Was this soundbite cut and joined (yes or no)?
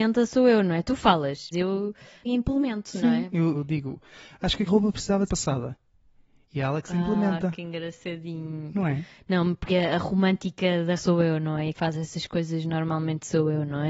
yes